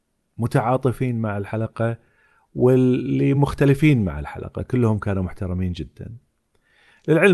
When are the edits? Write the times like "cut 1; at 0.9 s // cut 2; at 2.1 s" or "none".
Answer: none